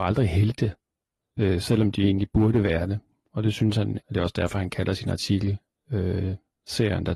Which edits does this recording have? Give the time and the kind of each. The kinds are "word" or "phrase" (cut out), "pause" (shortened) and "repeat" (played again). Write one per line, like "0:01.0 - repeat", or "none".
0:04.0 - word